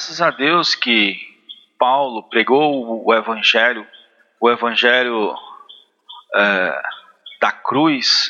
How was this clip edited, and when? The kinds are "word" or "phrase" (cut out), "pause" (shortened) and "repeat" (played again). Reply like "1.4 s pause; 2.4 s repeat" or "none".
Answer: none